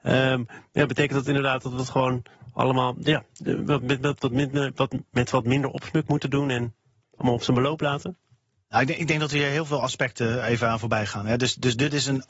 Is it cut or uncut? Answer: uncut